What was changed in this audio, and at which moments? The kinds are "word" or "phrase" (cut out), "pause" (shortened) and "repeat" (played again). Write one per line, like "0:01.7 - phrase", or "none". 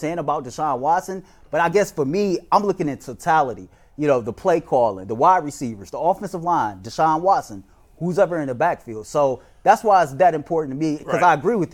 none